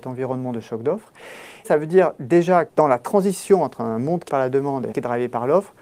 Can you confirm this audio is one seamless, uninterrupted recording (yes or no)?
no